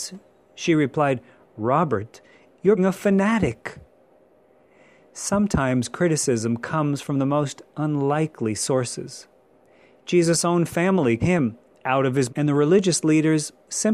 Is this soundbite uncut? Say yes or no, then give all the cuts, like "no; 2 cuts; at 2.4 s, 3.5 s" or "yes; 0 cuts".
no; 3 cuts; at 2.8 s, 11.2 s, 12.3 s